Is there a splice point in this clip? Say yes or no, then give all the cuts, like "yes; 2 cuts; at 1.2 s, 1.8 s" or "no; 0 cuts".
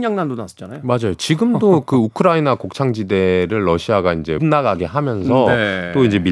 yes; 1 cut; at 4.4 s